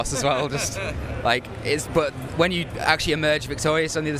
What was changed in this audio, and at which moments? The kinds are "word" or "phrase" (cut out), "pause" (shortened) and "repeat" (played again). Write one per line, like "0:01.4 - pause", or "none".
none